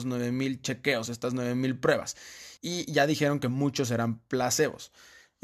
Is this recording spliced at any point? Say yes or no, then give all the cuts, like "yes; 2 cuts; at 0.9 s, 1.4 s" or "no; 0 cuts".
yes; 1 cut; at 2.6 s